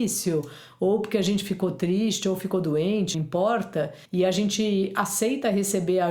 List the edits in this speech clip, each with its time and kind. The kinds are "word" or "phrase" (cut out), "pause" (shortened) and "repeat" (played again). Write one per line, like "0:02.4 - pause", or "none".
0:03.1 - word
0:04.0 - pause